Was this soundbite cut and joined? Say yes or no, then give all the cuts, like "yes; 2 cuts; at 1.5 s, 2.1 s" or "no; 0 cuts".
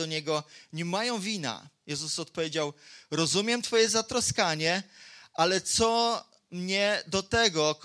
no; 0 cuts